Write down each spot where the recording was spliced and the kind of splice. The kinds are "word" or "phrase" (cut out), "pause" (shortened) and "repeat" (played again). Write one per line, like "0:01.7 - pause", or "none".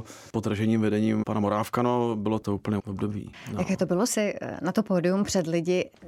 0:01.2 - word
0:02.8 - word
0:04.1 - word